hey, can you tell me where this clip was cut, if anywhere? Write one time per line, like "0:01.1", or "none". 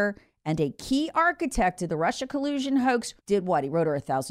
0:03.2